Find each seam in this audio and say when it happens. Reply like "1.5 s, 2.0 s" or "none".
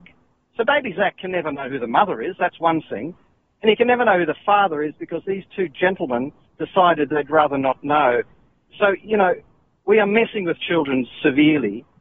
none